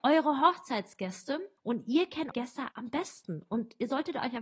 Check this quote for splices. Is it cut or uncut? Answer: cut